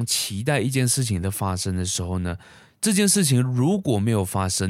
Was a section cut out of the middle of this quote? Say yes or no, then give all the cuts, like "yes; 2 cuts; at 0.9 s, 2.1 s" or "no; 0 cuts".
no; 0 cuts